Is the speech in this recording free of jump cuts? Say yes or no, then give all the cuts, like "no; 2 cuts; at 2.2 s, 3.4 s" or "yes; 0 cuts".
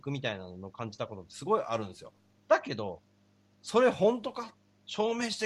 no; 1 cut; at 2.4 s